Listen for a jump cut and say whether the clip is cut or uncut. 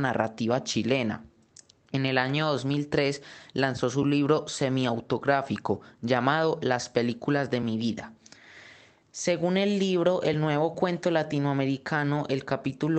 uncut